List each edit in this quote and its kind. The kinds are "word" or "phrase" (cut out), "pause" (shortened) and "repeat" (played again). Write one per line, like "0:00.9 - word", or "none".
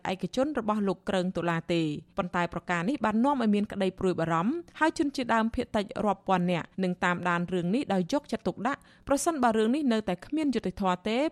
0:02.1 - pause
0:04.7 - pause
0:06.7 - pause